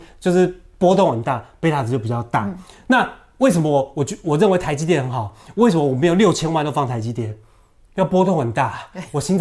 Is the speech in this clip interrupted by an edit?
no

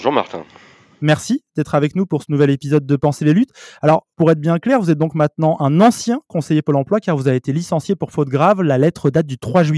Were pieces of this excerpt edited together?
yes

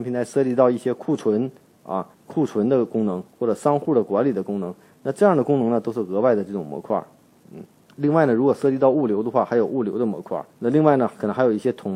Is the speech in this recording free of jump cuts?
no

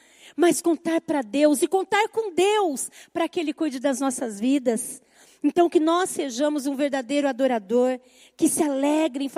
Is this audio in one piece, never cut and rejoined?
yes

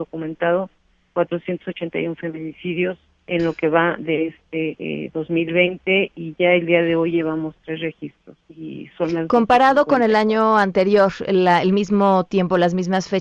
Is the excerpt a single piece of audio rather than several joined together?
no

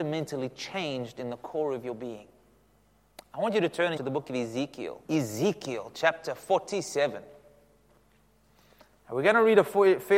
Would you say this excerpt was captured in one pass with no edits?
no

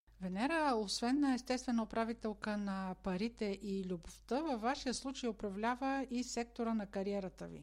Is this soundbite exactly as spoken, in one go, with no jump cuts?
yes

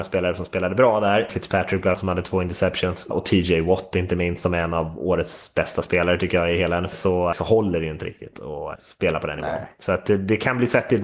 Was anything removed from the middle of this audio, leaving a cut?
yes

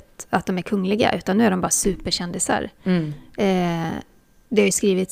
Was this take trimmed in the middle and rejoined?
no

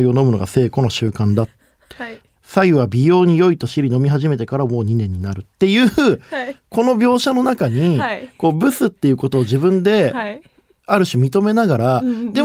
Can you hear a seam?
no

